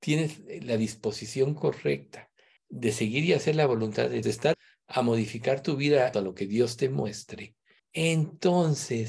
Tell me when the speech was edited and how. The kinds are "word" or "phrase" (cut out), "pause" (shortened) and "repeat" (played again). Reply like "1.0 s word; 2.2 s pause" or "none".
2.6 s pause; 4.2 s word; 4.5 s word; 6.1 s phrase; 7.8 s pause